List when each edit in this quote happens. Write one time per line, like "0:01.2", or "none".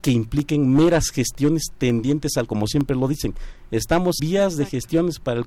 0:02.5
0:04.2